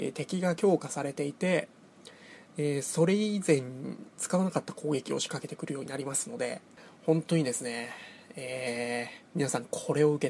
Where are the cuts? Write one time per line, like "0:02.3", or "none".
0:09.3

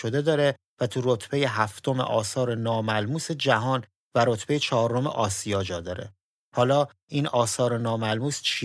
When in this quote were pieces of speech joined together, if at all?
none

